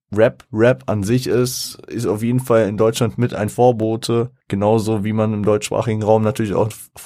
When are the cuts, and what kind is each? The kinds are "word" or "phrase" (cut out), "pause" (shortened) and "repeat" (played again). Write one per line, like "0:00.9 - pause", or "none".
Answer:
0:04.4 - pause